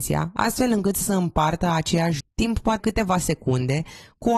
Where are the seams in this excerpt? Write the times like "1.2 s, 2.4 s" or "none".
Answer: 1.0 s, 2.2 s, 2.8 s